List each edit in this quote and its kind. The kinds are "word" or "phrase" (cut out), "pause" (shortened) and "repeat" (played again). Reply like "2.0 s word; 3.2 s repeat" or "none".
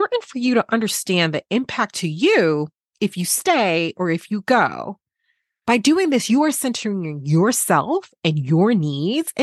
none